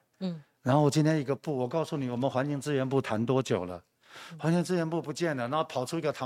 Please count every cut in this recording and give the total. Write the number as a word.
zero